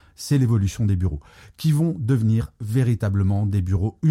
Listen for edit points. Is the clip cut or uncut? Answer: uncut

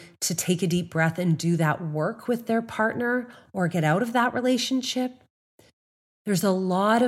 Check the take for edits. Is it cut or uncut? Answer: uncut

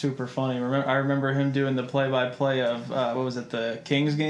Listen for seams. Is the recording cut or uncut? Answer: uncut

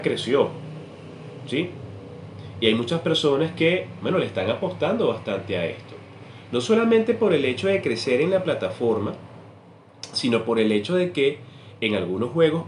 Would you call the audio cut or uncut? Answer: uncut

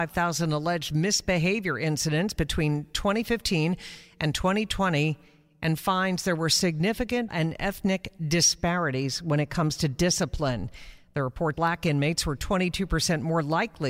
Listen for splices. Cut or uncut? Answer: cut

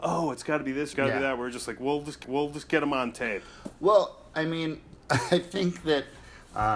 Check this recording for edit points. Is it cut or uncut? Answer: cut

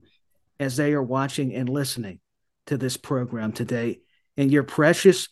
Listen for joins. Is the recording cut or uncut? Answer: uncut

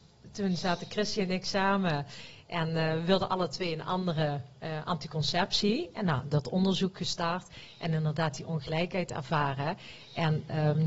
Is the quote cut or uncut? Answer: uncut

